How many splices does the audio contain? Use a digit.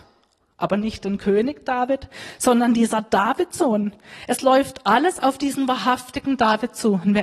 0